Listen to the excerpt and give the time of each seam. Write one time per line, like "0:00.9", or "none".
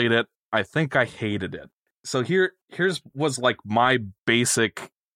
none